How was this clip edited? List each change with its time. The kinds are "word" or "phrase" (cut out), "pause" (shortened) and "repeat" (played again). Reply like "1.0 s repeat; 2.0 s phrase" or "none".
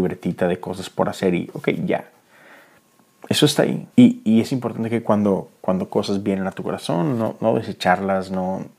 3.9 s pause